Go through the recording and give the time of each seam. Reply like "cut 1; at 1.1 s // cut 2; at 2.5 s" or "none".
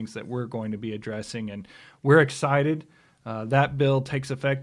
none